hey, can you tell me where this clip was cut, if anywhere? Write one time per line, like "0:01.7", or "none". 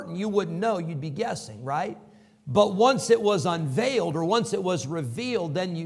none